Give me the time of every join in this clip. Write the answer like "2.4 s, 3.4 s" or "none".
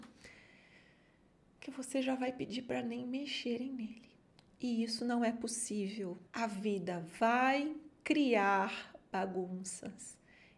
4.3 s, 6.3 s

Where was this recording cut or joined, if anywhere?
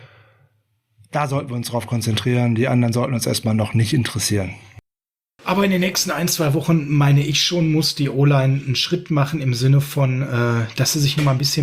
none

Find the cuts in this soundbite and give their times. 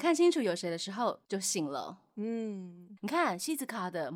3.0 s

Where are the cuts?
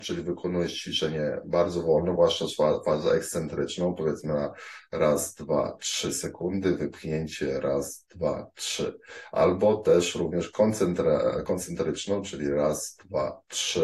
none

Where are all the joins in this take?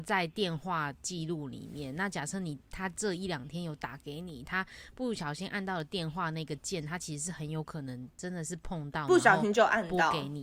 8.1 s

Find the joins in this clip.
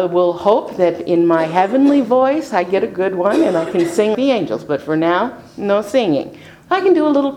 4.1 s

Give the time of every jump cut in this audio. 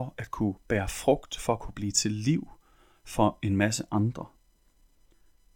none

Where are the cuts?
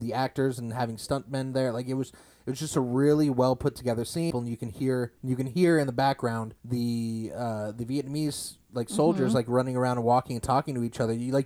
5.2 s, 6.6 s

